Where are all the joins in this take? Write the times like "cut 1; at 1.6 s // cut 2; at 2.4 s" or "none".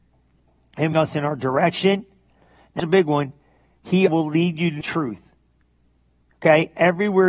cut 1; at 0.9 s // cut 2; at 2.8 s // cut 3; at 4.1 s // cut 4; at 4.8 s